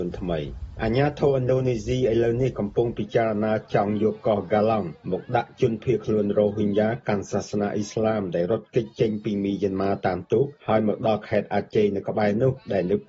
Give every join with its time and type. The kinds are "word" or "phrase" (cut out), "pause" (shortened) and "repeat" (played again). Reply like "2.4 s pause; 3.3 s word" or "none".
none